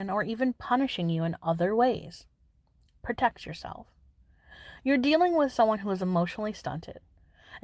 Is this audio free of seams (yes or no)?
yes